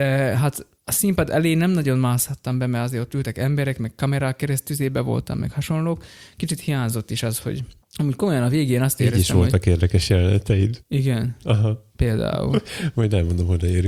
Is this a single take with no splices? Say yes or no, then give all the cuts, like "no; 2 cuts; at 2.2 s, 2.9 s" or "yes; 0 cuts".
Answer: yes; 0 cuts